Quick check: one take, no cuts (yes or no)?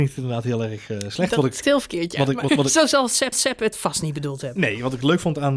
no